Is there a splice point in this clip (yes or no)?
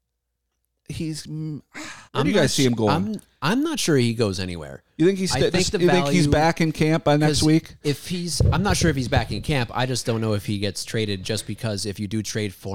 yes